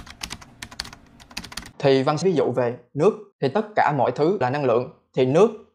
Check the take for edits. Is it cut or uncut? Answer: cut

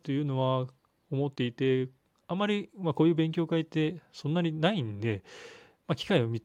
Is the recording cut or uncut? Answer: uncut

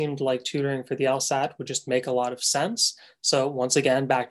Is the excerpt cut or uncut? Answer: uncut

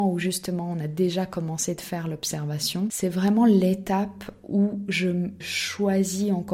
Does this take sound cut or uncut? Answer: cut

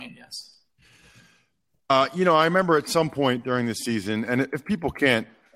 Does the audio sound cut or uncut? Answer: uncut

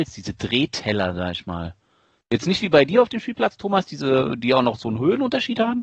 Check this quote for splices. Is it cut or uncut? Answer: uncut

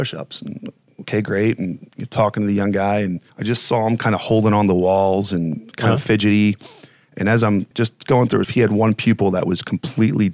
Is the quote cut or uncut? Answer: cut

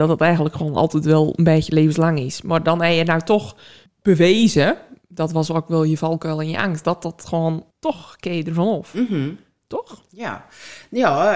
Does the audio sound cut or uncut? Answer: cut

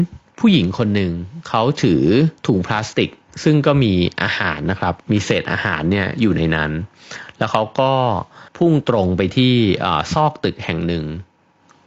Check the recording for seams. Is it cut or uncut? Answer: cut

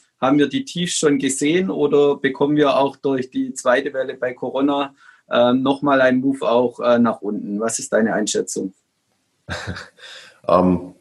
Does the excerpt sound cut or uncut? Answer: uncut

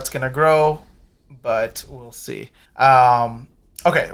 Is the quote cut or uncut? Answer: cut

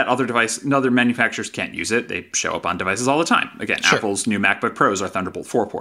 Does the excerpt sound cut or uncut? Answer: uncut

